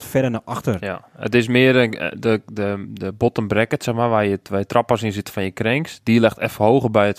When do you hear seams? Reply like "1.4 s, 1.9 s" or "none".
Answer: none